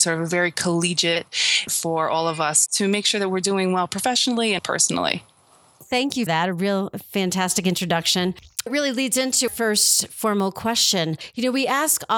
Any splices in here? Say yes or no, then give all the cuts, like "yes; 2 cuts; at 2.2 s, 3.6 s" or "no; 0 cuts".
yes; 6 cuts; at 1.7 s, 2.7 s, 4.6 s, 6.3 s, 8.7 s, 9.5 s